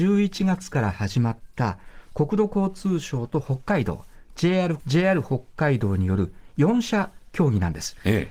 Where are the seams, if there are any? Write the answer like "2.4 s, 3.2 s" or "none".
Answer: 4.8 s

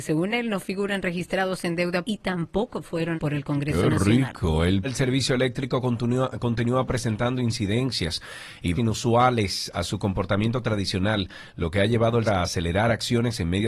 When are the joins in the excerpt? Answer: 2.0 s, 3.2 s, 4.8 s, 8.8 s, 12.3 s

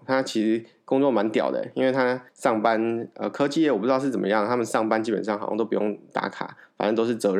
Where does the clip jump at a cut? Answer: 2.3 s

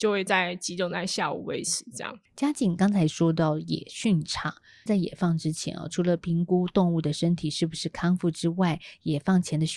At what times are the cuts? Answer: 2.3 s, 4.9 s

